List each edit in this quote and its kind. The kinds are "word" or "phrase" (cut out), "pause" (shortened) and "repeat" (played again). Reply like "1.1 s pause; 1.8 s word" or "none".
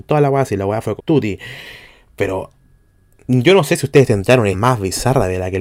1.0 s word; 4.5 s word